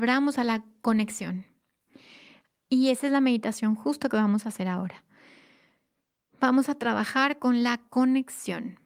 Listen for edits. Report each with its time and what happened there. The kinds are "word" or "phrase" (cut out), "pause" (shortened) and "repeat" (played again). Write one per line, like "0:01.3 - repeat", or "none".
none